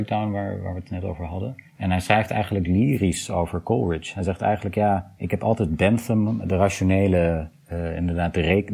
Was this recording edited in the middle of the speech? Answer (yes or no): yes